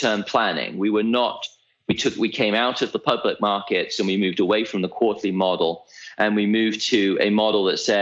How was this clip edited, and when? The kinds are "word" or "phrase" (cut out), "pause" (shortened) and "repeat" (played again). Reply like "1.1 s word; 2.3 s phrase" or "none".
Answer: none